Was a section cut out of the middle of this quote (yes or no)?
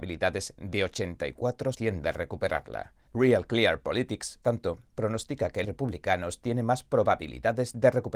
yes